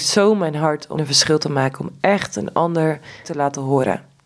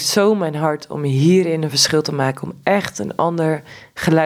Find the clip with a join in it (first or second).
first